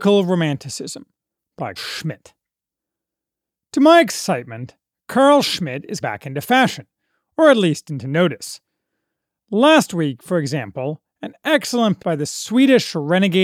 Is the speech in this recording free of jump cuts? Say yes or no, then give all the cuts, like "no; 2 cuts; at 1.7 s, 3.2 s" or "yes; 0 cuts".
no; 3 cuts; at 1.8 s, 6.0 s, 12.0 s